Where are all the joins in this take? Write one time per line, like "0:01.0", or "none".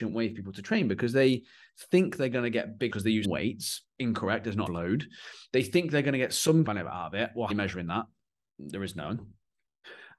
0:02.9
0:03.2
0:04.7
0:06.6
0:07.5